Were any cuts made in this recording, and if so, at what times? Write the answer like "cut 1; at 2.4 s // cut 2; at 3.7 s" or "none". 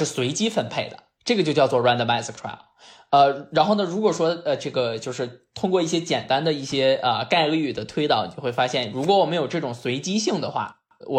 cut 1; at 2.4 s